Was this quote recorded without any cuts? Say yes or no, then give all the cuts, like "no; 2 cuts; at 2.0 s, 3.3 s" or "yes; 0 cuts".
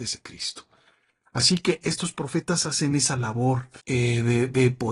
no; 1 cut; at 3.8 s